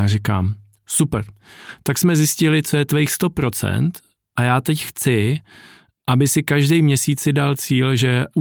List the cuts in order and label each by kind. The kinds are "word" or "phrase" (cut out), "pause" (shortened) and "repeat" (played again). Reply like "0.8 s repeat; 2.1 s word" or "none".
none

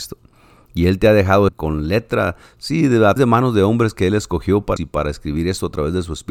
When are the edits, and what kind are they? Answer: 1.5 s phrase; 3.2 s word; 4.8 s word

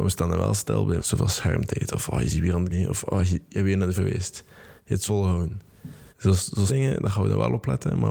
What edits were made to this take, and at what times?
1.0 s word; 2.7 s word; 4.0 s word; 5.1 s word; 6.1 s pause; 6.7 s word

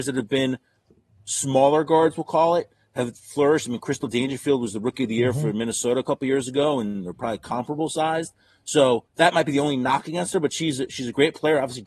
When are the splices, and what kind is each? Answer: 9.1 s pause

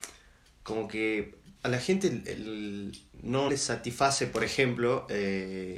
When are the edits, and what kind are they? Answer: 1.6 s pause; 3.5 s word

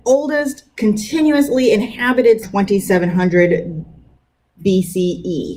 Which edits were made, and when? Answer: 2.4 s phrase

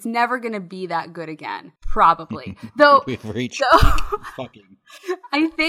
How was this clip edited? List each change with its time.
1.8 s pause

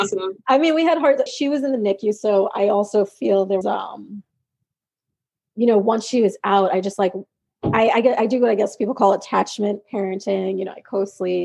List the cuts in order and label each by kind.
1.3 s word; 3.6 s word

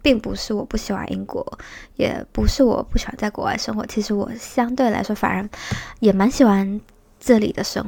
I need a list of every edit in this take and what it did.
none

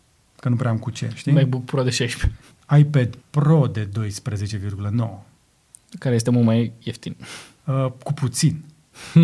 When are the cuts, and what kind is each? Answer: 3.2 s pause

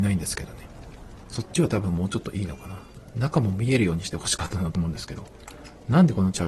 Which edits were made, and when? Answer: none

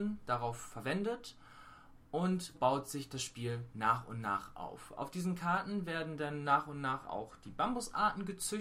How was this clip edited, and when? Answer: 2.5 s word

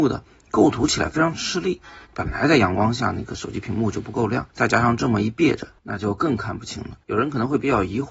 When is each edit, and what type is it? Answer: 2.0 s pause; 4.5 s pause; 5.8 s pause; 7.0 s pause

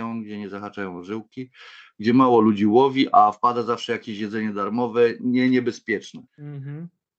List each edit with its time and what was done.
6.3 s pause

